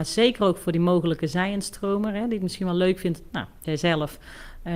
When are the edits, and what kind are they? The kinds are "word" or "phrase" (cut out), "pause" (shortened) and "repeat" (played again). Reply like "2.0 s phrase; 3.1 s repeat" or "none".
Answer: 3.6 s word

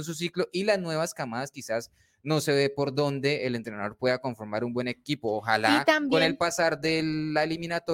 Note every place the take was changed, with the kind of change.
none

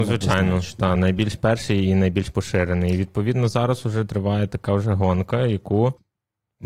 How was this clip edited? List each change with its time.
none

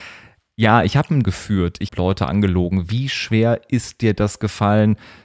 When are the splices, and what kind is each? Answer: 1.2 s word; 1.9 s word

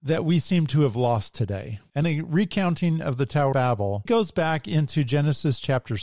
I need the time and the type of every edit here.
2.0 s word; 3.5 s word; 4.1 s word

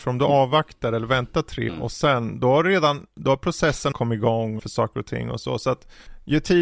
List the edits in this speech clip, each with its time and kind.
1.7 s word; 3.9 s phrase; 4.6 s phrase

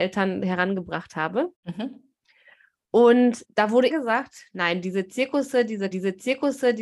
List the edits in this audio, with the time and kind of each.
1.5 s pause; 3.4 s word; 3.9 s word; 5.9 s repeat

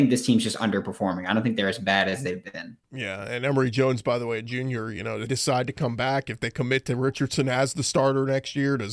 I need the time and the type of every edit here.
2.8 s pause; 5.3 s word

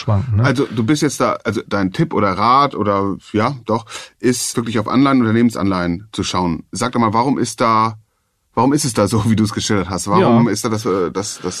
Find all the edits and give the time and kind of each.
none

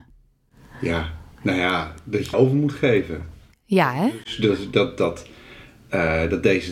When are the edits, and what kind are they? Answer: 1.3 s pause; 2.3 s word

